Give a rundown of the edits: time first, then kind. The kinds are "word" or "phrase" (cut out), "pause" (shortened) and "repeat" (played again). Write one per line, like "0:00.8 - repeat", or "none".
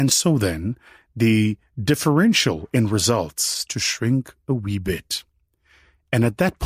0:03.7 - word

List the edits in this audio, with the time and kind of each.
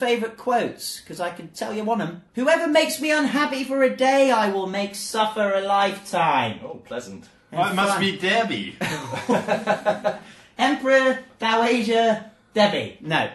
0:02.3 - pause

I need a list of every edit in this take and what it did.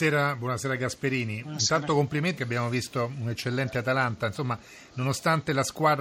0:02.4 - word

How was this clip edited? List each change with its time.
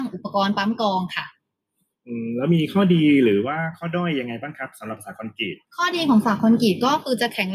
0:05.6 - pause

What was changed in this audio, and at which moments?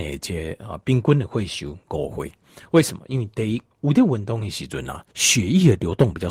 0:03.7 - pause
0:05.1 - pause

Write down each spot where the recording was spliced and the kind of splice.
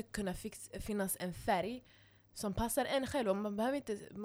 none

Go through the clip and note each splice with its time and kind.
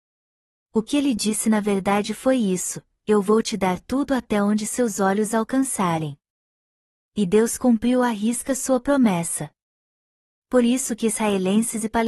none

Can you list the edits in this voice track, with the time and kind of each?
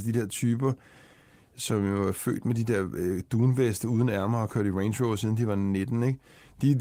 none

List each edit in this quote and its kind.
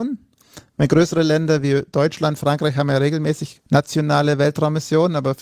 0:03.7 - pause

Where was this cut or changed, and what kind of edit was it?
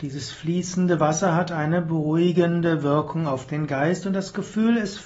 none

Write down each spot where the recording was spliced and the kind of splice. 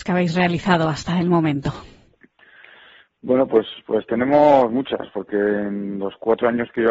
none

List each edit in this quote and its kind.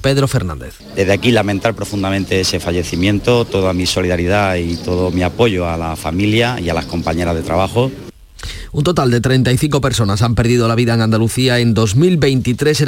none

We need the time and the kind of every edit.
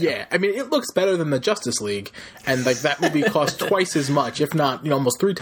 none

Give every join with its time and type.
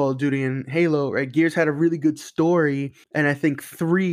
0:03.0 - pause

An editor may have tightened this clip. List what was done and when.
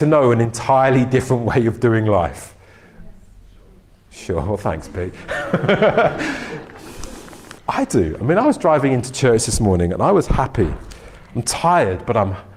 0:07.6 - pause

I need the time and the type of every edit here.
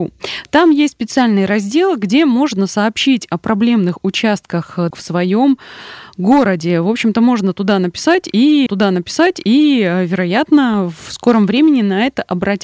0:04.9 - word
0:08.7 - repeat

